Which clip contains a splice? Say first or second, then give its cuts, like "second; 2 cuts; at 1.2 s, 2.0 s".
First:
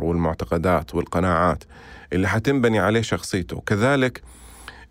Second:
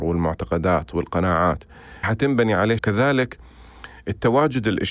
second; 2 cuts; at 2.0 s, 2.8 s